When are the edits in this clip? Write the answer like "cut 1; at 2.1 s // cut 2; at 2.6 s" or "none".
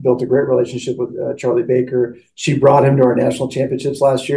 none